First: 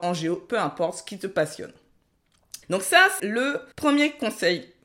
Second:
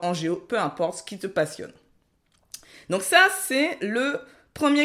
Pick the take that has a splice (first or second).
first